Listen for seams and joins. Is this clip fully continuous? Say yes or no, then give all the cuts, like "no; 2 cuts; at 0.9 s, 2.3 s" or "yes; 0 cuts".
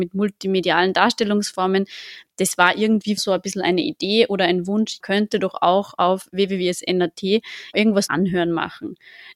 no; 4 cuts; at 3.2 s, 5.0 s, 7.7 s, 8.1 s